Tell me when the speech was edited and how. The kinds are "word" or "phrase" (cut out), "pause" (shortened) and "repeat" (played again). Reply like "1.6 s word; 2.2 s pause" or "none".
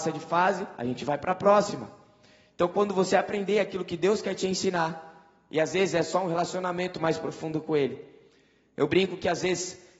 none